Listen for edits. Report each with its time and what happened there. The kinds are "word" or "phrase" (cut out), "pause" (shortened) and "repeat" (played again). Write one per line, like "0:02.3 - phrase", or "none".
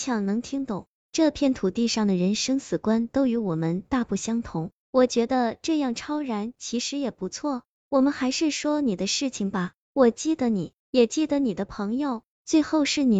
0:10.8 - pause